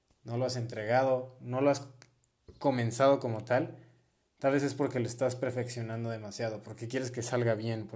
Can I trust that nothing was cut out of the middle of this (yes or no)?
yes